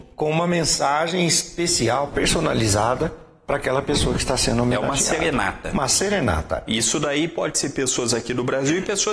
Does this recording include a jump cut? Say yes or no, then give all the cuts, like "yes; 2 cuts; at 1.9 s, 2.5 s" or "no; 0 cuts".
no; 0 cuts